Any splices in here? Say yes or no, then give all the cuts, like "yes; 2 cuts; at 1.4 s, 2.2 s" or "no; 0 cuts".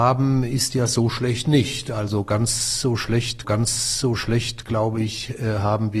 yes; 1 cut; at 3.4 s